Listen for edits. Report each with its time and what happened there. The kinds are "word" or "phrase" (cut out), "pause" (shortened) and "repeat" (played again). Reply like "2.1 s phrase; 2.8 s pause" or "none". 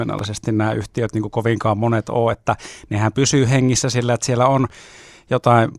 none